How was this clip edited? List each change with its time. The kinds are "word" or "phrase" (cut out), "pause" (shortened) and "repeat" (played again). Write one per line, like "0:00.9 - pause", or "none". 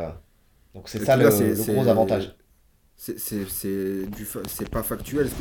none

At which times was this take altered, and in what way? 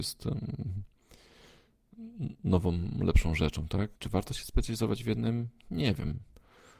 0:04.0 - pause

